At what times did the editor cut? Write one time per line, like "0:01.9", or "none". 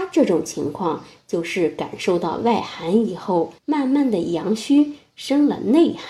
0:03.6